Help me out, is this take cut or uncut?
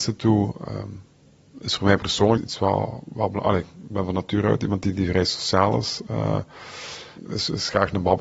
cut